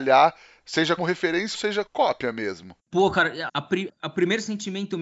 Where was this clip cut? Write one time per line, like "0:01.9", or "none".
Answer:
0:01.0
0:01.5
0:01.9
0:03.5
0:03.9

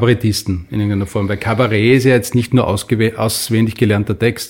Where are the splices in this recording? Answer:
none

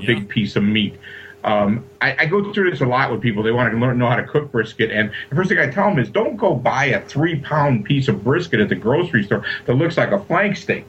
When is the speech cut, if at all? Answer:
none

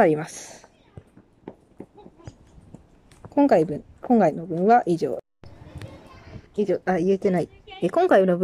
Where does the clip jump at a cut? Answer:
0:06.5

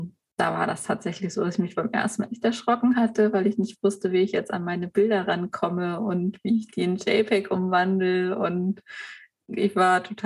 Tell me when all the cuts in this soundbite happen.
none

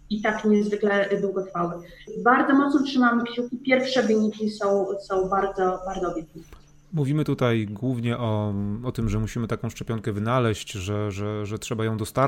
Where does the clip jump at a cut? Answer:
none

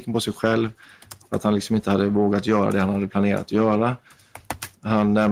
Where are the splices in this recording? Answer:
none

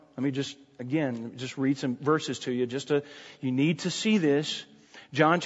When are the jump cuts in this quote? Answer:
none

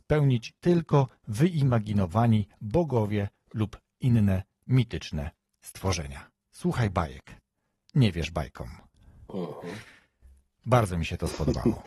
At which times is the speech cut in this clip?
none

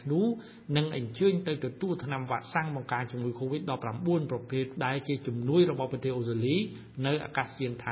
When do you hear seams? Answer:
0:04.8

